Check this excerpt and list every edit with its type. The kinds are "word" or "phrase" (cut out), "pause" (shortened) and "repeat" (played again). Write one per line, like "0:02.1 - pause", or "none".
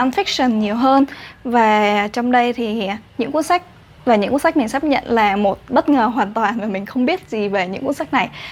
none